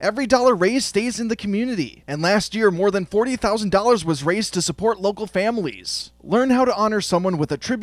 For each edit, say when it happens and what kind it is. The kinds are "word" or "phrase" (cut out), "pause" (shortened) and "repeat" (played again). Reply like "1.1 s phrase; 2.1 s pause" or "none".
none